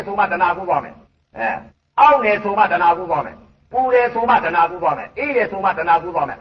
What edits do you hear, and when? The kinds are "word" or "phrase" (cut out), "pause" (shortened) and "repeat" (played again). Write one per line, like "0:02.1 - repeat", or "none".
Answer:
0:01.0 - pause
0:01.7 - pause